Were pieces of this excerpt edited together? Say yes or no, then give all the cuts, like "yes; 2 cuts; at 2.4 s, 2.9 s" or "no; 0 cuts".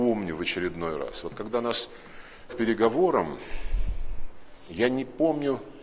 yes; 1 cut; at 2.5 s